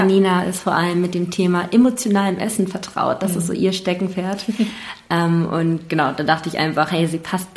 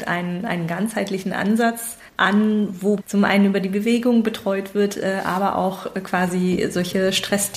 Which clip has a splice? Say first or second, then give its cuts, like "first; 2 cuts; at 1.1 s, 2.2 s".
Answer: second; 2 cuts; at 2.1 s, 3.0 s